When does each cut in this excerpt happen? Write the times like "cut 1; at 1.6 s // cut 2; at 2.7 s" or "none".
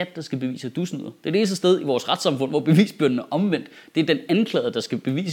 none